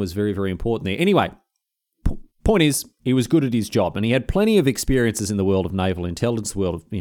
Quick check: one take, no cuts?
yes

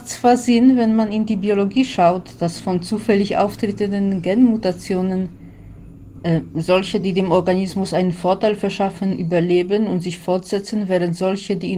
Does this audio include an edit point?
no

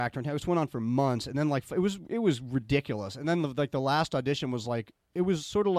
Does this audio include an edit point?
no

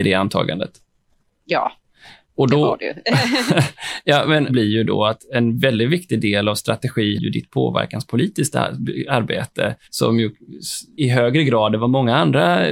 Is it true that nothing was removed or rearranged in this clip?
no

